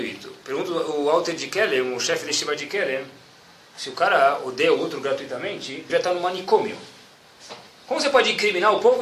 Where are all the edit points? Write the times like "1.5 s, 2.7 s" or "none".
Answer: 5.9 s